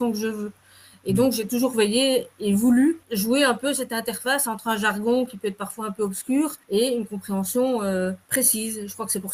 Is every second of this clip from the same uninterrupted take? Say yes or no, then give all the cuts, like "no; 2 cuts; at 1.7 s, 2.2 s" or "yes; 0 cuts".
no; 3 cuts; at 3.0 s, 6.6 s, 8.2 s